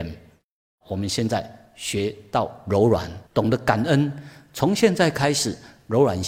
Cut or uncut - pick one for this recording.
cut